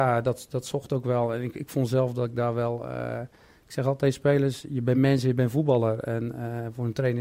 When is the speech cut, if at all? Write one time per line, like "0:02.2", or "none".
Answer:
none

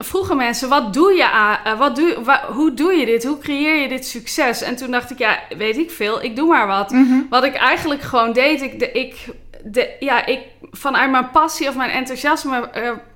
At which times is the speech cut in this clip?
0:10.7

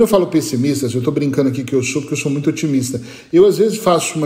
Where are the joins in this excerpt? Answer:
none

